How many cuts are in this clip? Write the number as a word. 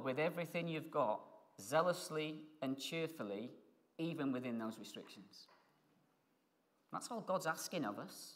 zero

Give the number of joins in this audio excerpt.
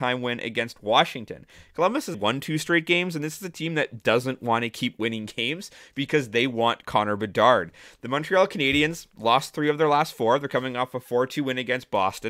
one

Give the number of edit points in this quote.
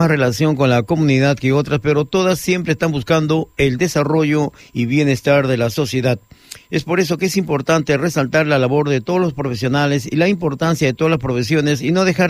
one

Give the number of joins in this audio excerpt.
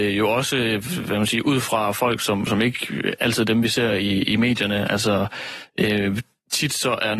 zero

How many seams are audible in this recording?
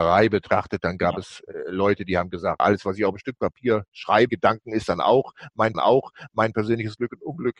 three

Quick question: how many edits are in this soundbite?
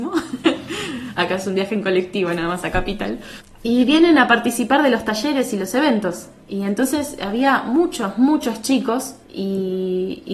one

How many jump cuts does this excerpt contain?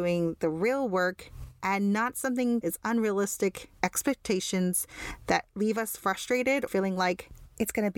two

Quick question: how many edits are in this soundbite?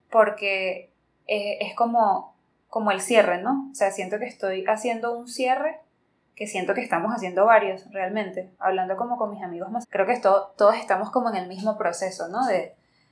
one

